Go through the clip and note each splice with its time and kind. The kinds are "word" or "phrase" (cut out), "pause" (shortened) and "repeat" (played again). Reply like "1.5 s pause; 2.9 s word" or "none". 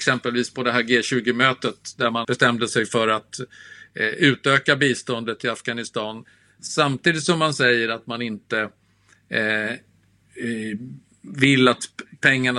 2.2 s word